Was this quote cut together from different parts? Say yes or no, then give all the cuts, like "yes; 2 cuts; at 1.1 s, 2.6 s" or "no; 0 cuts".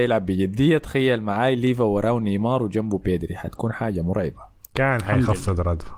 no; 0 cuts